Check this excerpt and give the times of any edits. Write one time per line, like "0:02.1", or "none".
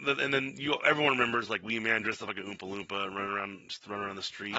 none